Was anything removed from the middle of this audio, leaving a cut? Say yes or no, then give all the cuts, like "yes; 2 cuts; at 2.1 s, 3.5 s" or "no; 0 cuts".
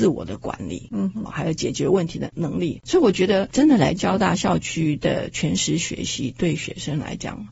yes; 1 cut; at 1.3 s